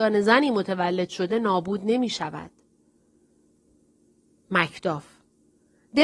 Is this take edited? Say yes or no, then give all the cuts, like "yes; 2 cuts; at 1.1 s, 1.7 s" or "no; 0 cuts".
no; 0 cuts